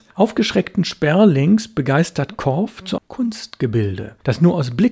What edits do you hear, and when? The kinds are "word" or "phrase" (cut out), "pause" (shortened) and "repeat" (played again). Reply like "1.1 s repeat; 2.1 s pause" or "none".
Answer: 3.0 s word